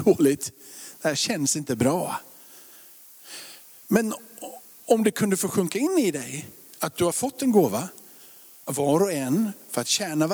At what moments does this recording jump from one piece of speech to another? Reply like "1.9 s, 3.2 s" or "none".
none